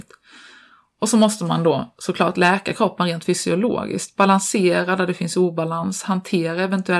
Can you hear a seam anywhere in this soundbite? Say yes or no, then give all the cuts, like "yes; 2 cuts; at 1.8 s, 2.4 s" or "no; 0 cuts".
no; 0 cuts